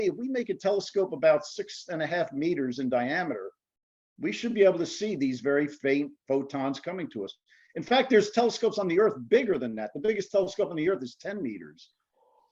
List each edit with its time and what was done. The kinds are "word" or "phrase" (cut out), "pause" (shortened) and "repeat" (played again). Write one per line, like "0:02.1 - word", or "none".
none